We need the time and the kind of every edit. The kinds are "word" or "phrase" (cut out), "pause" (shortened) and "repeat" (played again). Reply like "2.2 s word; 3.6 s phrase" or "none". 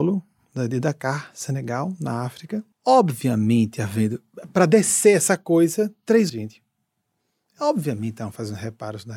2.7 s pause; 6.3 s word

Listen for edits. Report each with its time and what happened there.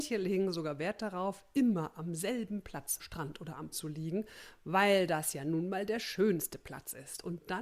3.0 s word; 3.7 s word

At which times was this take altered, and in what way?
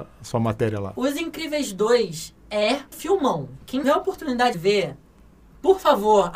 2.9 s word; 3.8 s word; 4.5 s word

